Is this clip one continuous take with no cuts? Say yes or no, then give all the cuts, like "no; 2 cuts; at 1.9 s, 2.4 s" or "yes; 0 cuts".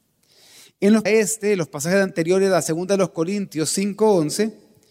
no; 1 cut; at 1.1 s